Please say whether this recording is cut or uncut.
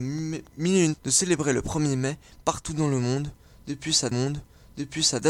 cut